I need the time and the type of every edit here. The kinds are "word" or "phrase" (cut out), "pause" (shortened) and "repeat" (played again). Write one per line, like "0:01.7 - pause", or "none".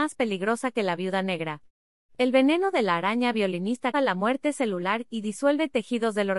0:03.9 - word